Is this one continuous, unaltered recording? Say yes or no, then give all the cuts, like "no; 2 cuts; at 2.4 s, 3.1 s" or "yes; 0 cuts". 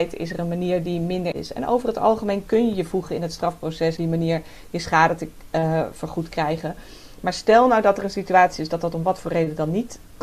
no; 2 cuts; at 1.3 s, 4.0 s